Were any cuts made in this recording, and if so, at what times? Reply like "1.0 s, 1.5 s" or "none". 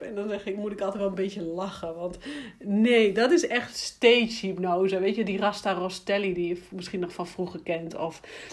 none

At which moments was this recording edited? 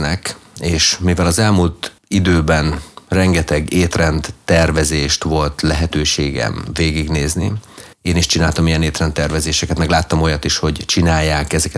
2.0 s, 7.9 s

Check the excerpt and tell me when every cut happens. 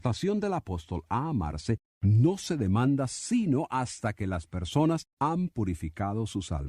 5.1 s

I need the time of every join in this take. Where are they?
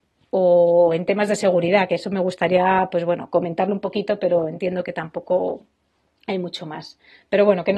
none

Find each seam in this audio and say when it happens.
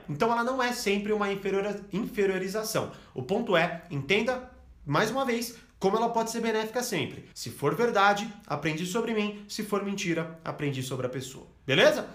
7.3 s

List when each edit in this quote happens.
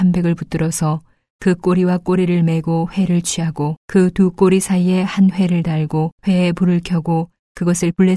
3.8 s, 6.2 s

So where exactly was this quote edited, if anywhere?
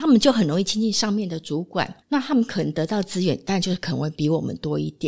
2.0 s

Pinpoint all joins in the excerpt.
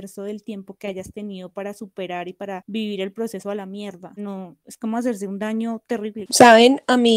4.2 s

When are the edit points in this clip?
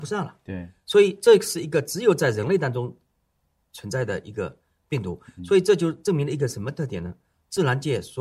none

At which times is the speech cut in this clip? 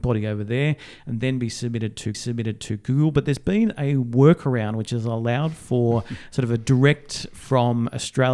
2.1 s

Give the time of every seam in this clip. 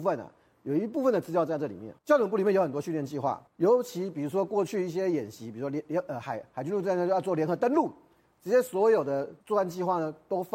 2.0 s, 3.5 s, 9.4 s

